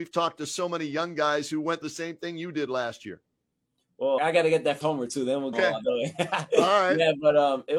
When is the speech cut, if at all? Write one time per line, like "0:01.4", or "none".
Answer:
0:01.8
0:04.2
0:04.8
0:05.5

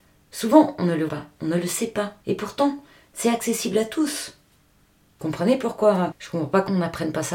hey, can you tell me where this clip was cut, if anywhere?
0:01.1
0:02.2

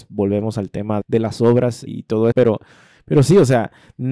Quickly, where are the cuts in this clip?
0:01.0
0:01.9
0:02.3

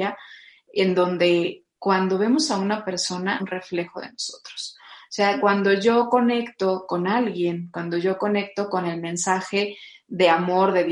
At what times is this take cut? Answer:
0:03.4

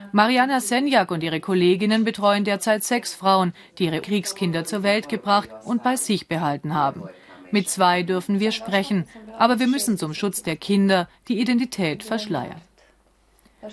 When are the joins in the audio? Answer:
0:04.0

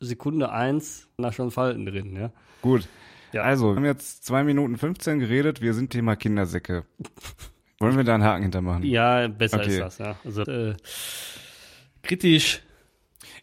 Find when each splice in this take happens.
0:01.2
0:03.8
0:05.9
0:10.4

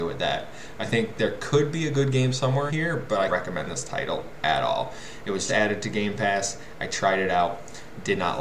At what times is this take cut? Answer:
0:02.7
0:03.3
0:05.5

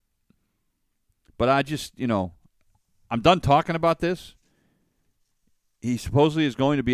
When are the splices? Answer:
none

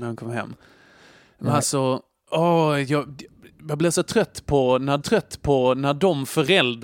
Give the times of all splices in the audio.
0:05.0

